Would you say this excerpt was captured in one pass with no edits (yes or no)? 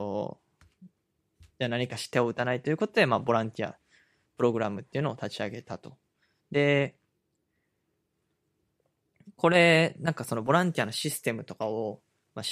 yes